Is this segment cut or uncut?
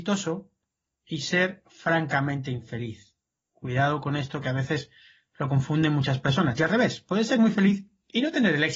uncut